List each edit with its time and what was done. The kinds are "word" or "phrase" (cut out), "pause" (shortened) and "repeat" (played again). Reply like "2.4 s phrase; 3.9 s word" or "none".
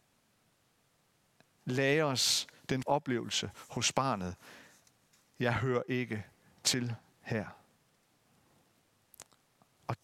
2.8 s word